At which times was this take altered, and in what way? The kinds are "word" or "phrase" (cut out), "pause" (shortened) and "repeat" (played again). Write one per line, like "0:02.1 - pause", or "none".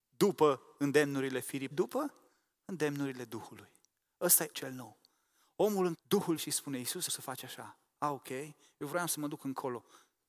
0:01.7 - word
0:04.5 - word
0:05.9 - word
0:06.4 - word
0:07.1 - word